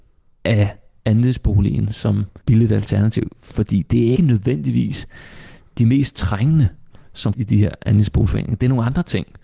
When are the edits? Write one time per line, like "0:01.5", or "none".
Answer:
0:02.4
0:04.2
0:07.3